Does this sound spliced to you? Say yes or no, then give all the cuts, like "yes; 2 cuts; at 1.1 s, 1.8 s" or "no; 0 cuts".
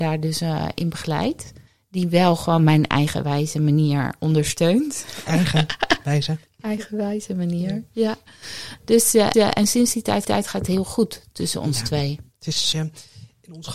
yes; 5 cuts; at 1.7 s, 9.3 s, 10.2 s, 12.3 s, 12.7 s